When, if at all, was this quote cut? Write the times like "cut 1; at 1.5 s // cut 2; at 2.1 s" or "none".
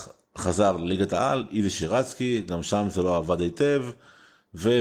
none